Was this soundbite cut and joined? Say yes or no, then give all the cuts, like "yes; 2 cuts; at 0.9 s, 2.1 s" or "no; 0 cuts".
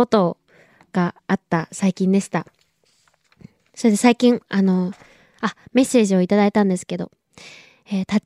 no; 0 cuts